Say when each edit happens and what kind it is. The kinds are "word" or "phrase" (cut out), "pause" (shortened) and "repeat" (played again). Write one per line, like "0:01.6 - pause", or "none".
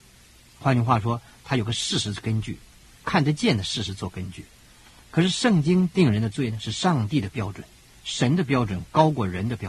none